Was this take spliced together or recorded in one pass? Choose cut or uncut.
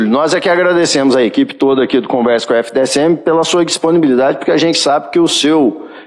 uncut